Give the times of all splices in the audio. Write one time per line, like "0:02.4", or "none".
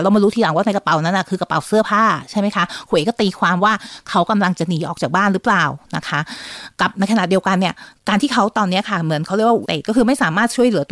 0:09.6